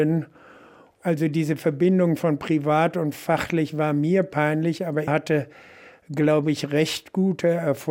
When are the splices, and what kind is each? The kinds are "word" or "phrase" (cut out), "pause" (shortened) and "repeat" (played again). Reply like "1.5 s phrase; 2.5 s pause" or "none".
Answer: 5.1 s word